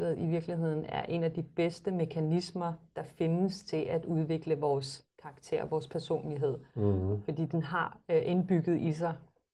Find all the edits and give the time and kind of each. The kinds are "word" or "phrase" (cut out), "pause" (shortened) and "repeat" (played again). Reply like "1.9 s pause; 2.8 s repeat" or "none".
5.1 s pause